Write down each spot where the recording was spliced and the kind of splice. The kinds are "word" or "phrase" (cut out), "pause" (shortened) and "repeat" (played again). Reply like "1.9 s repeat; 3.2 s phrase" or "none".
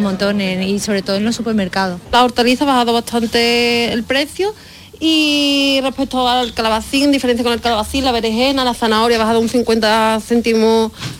none